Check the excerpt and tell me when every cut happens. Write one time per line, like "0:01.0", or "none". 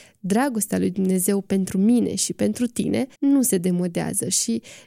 0:03.1